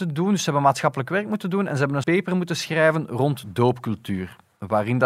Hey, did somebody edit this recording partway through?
yes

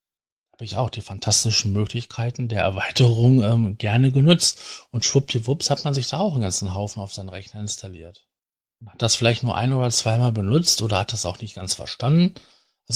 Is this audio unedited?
no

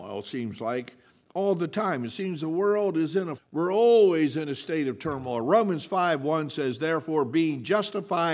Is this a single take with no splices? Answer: no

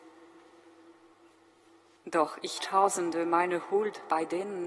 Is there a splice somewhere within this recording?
yes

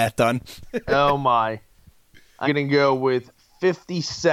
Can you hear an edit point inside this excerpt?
yes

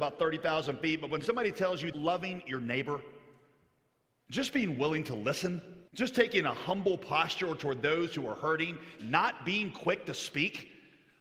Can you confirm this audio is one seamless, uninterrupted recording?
no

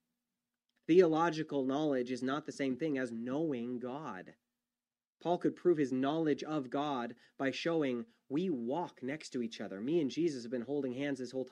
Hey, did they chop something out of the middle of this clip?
no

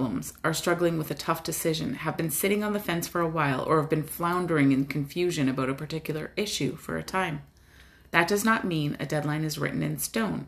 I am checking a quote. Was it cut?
no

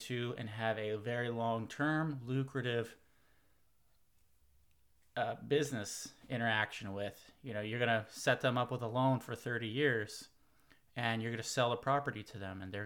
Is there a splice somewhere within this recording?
no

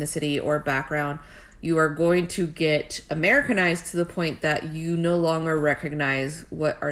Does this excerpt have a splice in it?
no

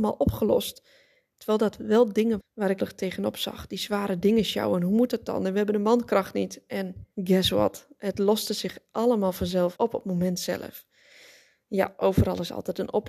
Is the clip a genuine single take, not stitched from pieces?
no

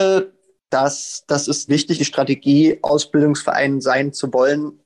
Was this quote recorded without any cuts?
no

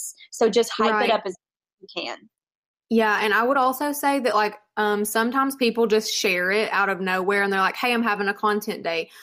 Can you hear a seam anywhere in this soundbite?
no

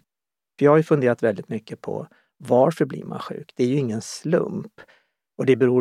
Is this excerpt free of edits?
yes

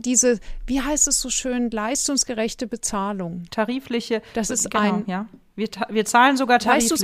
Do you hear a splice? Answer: no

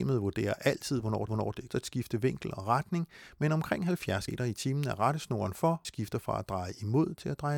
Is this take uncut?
no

